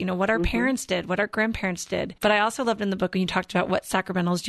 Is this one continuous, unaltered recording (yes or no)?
no